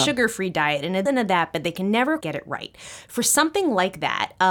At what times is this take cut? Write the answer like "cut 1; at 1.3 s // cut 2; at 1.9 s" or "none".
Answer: cut 1; at 1.1 s // cut 2; at 2.2 s

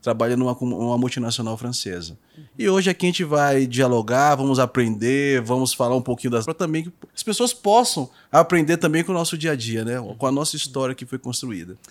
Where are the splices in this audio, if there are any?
cut 1; at 6.5 s // cut 2; at 7.1 s

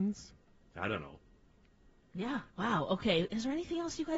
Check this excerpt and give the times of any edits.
cut 1; at 2.5 s

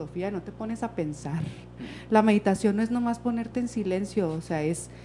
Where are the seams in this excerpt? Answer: none

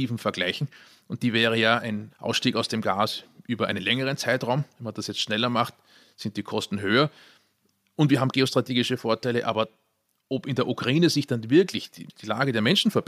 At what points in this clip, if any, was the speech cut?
none

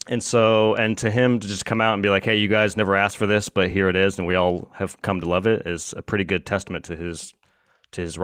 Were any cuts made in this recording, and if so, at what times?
none

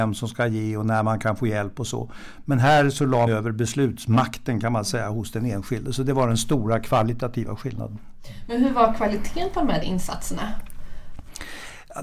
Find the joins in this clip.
cut 1; at 3.3 s // cut 2; at 9.8 s

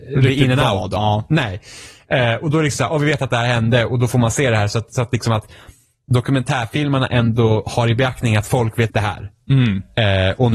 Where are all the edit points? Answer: cut 1; at 8.9 s

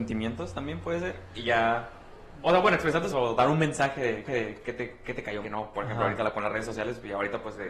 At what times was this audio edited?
cut 1; at 3.1 s // cut 2; at 4.3 s // cut 3; at 5.4 s

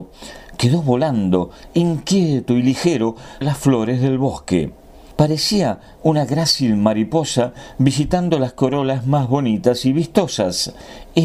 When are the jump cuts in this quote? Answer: cut 1; at 3.4 s

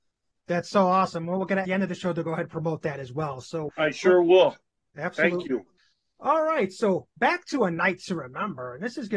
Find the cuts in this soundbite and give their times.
cut 1; at 1.6 s // cut 2; at 3.7 s // cut 3; at 5.8 s

